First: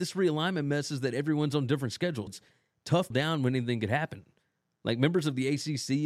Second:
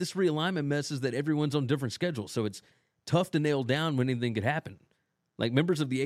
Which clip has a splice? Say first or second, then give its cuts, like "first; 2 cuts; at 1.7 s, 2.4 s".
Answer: first; 2 cuts; at 2.3 s, 3.1 s